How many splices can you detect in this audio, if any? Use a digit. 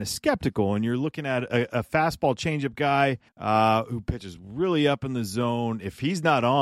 1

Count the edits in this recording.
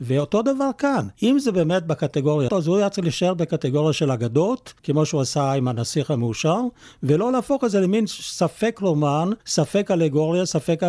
4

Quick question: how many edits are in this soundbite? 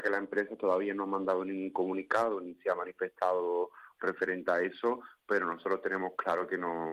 0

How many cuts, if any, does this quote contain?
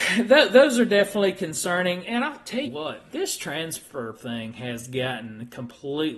3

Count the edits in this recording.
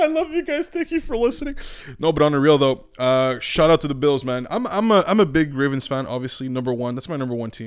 0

